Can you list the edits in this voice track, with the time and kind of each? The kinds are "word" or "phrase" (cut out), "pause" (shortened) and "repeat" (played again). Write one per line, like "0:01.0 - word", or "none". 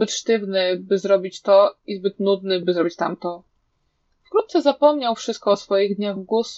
none